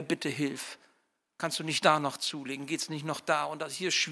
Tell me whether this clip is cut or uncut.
uncut